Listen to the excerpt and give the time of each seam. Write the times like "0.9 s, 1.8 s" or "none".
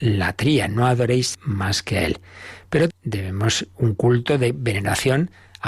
1.3 s, 2.9 s